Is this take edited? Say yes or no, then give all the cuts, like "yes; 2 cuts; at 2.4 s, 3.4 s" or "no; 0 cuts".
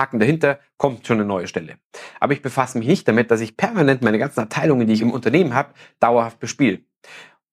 no; 0 cuts